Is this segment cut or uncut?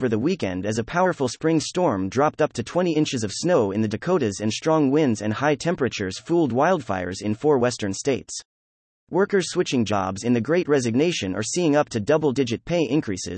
uncut